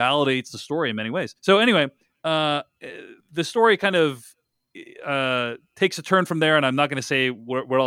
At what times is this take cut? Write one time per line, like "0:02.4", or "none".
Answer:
0:01.4
0:03.2